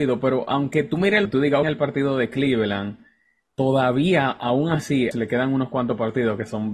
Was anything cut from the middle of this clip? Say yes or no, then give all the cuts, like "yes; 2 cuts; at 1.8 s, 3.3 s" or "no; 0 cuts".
yes; 3 cuts; at 1.2 s, 1.6 s, 5.1 s